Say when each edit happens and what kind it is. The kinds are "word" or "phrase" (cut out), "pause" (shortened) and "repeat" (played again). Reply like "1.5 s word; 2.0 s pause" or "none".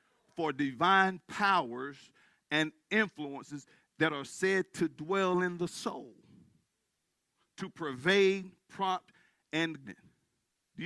9.8 s word

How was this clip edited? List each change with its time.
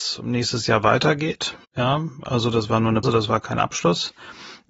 1.6 s pause; 3.0 s word

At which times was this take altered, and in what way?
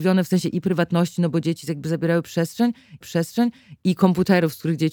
3.0 s repeat

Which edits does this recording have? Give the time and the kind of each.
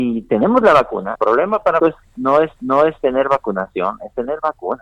1.2 s word; 1.8 s word; 2.6 s repeat

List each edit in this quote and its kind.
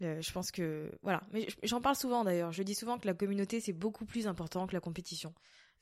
none

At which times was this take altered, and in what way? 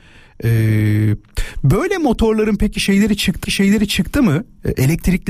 3.4 s repeat

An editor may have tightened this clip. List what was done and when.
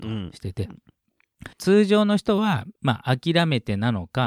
1.5 s pause; 2.8 s pause

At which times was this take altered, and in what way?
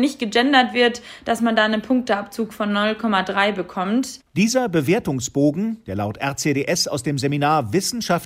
none

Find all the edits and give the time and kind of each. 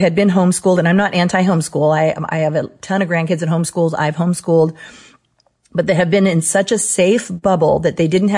none

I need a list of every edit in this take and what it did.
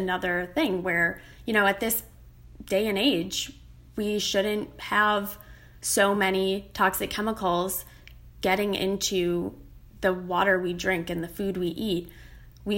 none

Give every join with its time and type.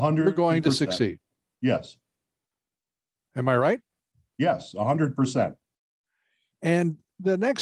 none

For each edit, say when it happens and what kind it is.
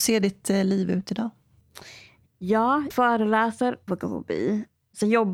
2.9 s word; 3.9 s word

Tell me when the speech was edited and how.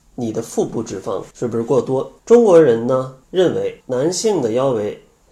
1.3 s pause; 2.2 s pause; 3.2 s pause; 3.8 s pause

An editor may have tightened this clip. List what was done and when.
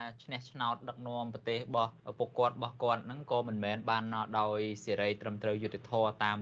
2.0 s pause

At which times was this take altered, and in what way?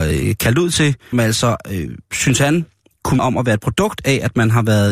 1.1 s word; 2.0 s pause; 3.2 s word

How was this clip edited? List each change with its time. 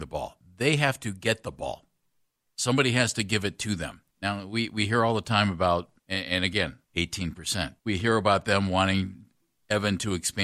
4.1 s pause; 6.0 s pause; 6.8 s pause; 7.8 s pause

